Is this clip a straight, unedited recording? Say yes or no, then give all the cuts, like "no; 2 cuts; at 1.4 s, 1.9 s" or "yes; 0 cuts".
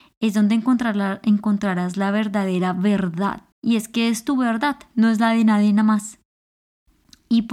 no; 1 cut; at 3.5 s